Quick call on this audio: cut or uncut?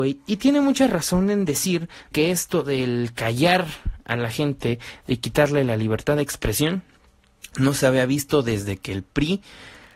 cut